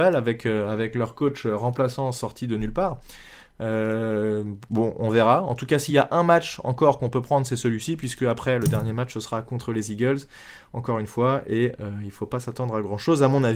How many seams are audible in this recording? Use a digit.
0